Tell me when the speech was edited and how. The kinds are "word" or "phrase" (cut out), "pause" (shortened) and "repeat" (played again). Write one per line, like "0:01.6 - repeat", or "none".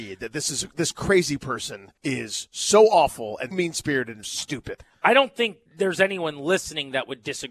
0:02.0 - pause
0:03.5 - word
0:04.2 - word
0:05.7 - pause